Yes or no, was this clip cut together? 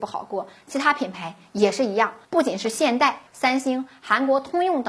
yes